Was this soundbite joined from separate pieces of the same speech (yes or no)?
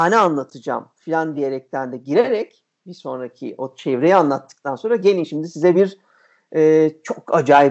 no